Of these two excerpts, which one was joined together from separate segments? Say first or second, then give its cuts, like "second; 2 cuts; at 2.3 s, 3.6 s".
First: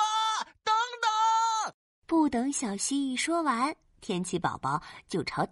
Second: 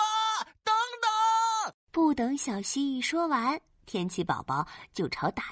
second; 1 cut; at 1.8 s